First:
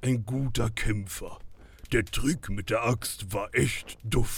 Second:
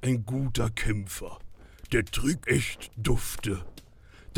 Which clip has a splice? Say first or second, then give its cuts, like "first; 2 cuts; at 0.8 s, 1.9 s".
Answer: second; 1 cut; at 2.4 s